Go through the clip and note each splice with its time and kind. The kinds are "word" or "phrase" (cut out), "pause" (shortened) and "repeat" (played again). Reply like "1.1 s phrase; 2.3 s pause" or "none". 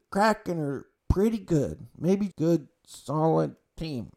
1.0 s pause; 2.3 s phrase